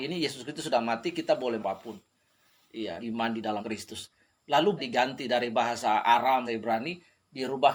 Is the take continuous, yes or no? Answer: no